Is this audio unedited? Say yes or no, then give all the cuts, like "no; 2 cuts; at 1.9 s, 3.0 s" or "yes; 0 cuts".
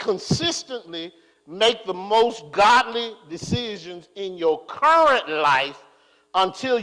yes; 0 cuts